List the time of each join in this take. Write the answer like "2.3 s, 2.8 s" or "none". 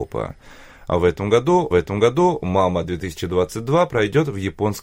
1.7 s